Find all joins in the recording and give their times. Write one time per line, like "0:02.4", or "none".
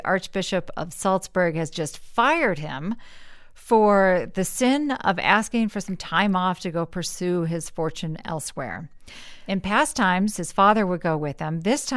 none